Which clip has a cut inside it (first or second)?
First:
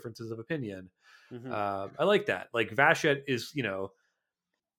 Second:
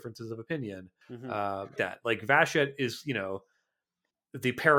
second